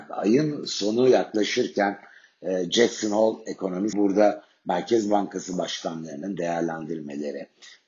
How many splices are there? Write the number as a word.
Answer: one